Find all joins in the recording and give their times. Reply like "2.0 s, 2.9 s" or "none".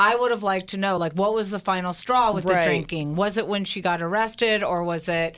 none